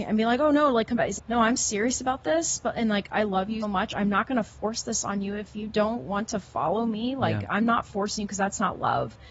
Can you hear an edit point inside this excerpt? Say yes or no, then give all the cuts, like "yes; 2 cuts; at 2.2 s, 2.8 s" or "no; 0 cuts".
yes; 2 cuts; at 1.2 s, 3.6 s